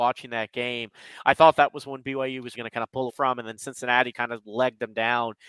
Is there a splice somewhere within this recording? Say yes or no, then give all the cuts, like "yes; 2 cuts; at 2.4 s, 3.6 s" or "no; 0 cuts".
yes; 3 cuts; at 2.5 s, 3.1 s, 4.1 s